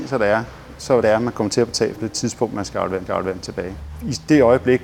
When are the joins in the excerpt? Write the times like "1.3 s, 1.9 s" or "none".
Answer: 1.0 s, 2.0 s, 3.1 s